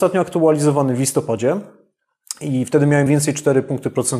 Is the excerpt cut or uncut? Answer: cut